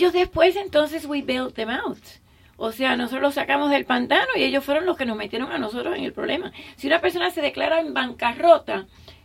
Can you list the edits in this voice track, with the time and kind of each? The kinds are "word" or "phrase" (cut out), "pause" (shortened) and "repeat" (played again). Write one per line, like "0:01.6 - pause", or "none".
none